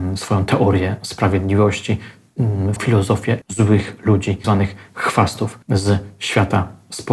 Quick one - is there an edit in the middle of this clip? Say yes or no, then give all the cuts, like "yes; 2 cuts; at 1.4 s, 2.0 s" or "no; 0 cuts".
yes; 4 cuts; at 2.8 s, 3.4 s, 4.4 s, 5.6 s